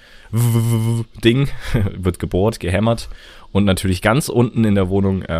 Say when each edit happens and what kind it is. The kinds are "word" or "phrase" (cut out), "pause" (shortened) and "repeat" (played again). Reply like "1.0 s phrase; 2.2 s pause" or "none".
none

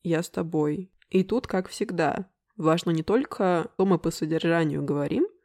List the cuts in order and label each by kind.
3.8 s word

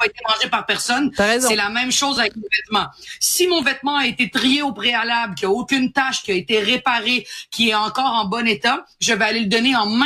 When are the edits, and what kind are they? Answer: none

